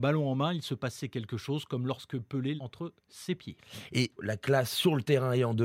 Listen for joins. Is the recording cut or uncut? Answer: cut